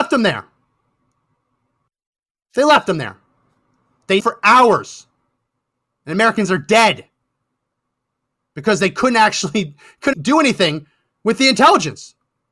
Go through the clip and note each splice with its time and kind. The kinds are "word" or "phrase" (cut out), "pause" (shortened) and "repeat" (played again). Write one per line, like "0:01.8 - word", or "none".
0:04.2 - word
0:10.1 - word